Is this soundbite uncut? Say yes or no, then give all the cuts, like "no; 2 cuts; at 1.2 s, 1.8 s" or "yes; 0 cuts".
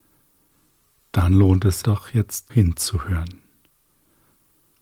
no; 2 cuts; at 1.8 s, 2.5 s